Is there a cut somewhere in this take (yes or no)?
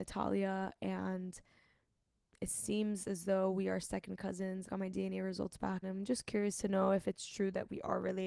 yes